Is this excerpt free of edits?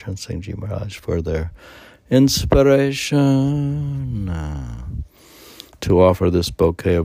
yes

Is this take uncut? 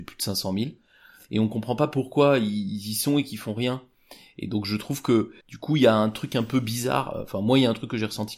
no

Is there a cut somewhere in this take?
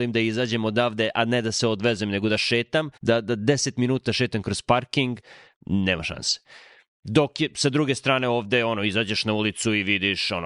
yes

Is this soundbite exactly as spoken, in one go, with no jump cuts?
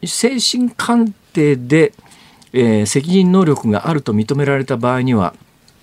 yes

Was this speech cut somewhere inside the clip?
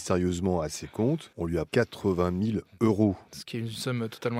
yes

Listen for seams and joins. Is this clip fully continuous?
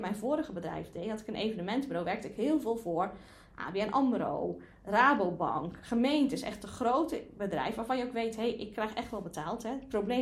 yes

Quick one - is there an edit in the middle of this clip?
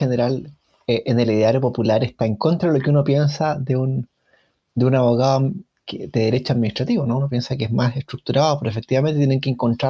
no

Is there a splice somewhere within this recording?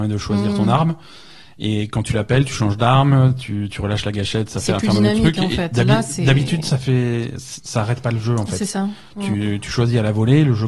no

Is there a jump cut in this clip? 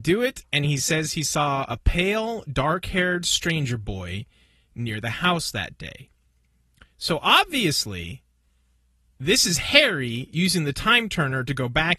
no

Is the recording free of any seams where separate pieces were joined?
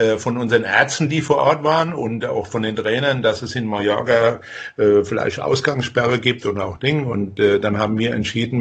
yes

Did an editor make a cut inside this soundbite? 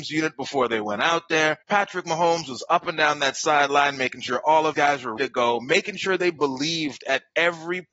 yes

